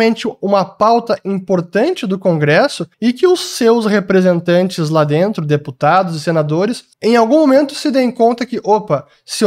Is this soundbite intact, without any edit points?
no; 2 cuts; at 2.9 s, 6.9 s

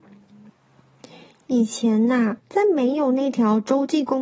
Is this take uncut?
no; 1 cut; at 2.4 s

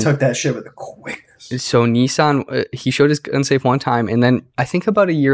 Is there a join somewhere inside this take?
no; 0 cuts

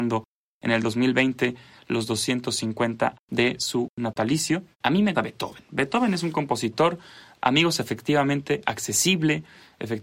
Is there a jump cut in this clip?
yes; 3 cuts; at 3.1 s, 4.7 s, 5.1 s

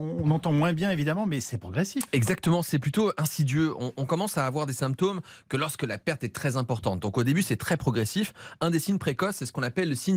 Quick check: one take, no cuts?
yes; 0 cuts

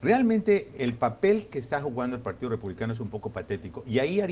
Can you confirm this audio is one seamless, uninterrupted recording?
yes; 0 cuts

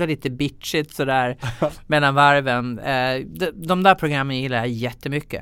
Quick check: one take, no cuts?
yes; 0 cuts

